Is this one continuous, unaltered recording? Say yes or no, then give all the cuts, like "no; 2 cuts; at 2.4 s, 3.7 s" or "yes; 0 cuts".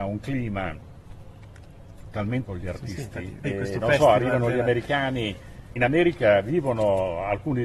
no; 3 cuts; at 2.4 s, 3.4 s, 5.8 s